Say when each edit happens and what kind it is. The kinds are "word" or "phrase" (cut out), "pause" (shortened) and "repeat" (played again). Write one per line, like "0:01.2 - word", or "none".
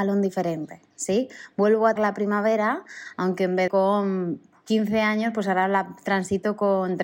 0:02.0 - word
0:03.7 - word